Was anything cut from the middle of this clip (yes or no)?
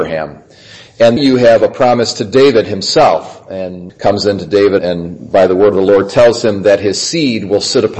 yes